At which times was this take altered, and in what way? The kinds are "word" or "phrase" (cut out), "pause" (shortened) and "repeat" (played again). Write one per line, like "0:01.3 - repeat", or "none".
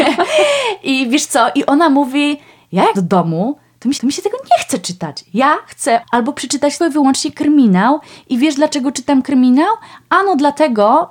0:02.9 - word
0:04.0 - repeat
0:06.0 - phrase
0:06.8 - word